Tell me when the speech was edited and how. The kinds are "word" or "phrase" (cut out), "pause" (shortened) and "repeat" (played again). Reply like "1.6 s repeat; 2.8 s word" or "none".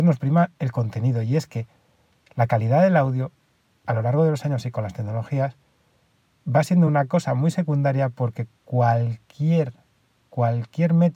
none